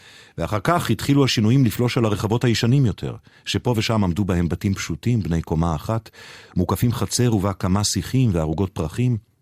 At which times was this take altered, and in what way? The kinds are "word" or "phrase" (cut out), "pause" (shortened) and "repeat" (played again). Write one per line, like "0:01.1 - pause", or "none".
none